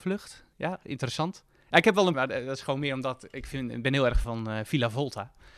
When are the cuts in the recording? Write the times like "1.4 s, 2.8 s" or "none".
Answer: 2.1 s, 4.2 s